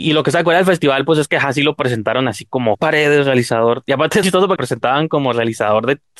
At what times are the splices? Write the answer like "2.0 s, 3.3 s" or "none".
2.7 s, 4.2 s, 4.6 s